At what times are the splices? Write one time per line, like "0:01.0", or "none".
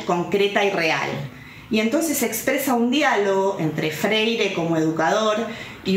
none